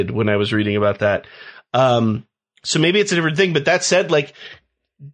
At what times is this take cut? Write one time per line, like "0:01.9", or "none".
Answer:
none